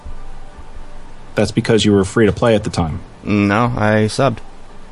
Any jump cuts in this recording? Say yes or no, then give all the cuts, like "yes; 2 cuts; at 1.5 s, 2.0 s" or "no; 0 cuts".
no; 0 cuts